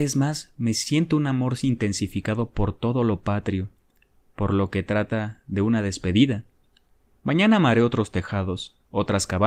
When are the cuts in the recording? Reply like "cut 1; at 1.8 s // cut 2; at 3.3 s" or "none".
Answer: none